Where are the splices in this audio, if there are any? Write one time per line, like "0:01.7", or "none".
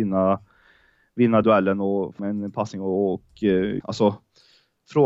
0:01.4
0:02.2
0:03.8